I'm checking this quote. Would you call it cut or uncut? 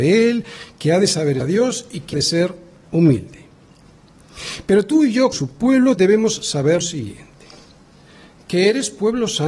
cut